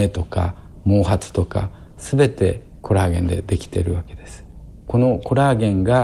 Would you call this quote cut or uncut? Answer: cut